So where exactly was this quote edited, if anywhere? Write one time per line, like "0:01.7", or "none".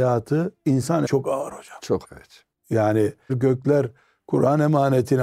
0:01.1
0:02.0
0:03.3